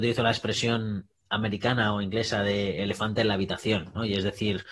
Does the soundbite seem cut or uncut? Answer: uncut